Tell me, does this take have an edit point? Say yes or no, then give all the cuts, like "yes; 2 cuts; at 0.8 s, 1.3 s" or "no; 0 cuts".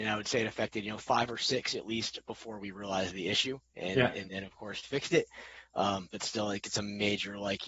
no; 0 cuts